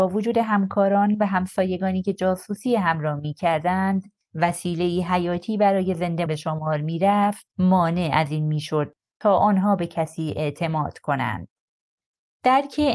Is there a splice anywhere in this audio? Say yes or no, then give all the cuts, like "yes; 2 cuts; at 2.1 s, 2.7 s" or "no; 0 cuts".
yes; 1 cut; at 6.3 s